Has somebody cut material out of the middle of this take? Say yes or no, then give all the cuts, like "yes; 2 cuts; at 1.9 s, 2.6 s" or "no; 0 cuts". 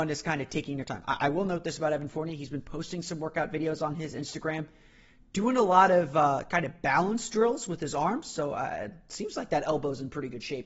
no; 0 cuts